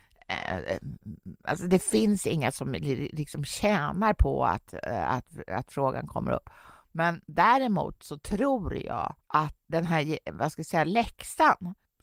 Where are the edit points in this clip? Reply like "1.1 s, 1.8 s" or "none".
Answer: 7.2 s, 9.2 s